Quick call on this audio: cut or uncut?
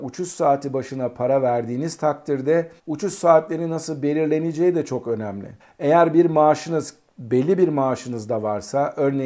cut